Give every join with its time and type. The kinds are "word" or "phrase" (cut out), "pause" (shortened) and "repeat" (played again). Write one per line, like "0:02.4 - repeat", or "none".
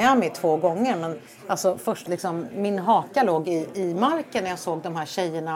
0:02.1 - phrase

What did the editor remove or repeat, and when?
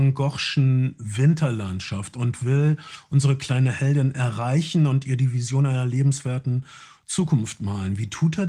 none

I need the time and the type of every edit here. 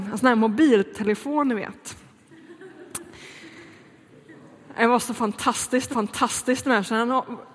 0:05.9 - repeat

